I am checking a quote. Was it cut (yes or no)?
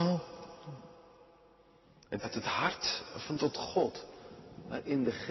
yes